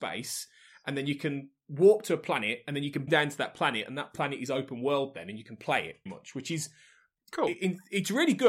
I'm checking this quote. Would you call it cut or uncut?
cut